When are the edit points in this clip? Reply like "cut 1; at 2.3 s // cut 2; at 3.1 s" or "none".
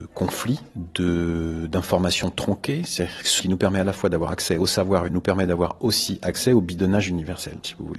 cut 1; at 3.4 s // cut 2; at 5.1 s

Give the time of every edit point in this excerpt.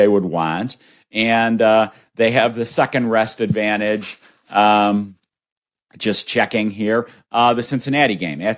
none

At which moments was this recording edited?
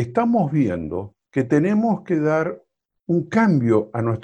cut 1; at 1.2 s

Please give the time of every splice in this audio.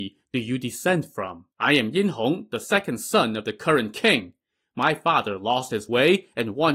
cut 1; at 1.5 s

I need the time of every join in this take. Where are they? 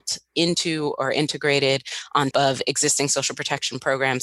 cut 1; at 2.3 s

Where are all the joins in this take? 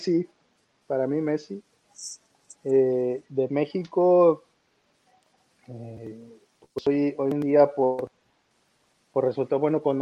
none

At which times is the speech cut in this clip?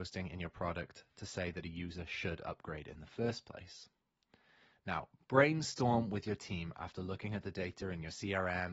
none

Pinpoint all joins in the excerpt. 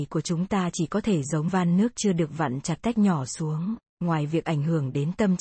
cut 1; at 1.5 s // cut 2; at 2.8 s

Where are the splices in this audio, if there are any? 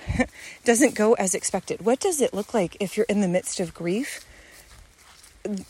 none

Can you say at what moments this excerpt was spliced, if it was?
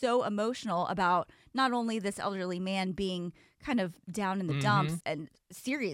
cut 1; at 5.0 s

